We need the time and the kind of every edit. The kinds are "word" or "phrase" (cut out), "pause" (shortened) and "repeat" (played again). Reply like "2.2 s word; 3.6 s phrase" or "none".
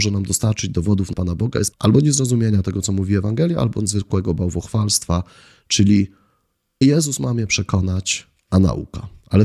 1.1 s word; 1.7 s word; 6.8 s word